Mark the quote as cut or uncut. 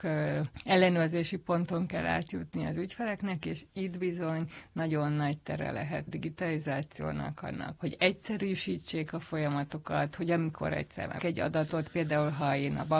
cut